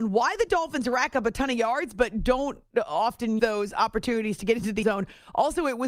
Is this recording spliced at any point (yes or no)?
yes